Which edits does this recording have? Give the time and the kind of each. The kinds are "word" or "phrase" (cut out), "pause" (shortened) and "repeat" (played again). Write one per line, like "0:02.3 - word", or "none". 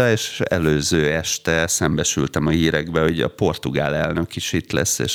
none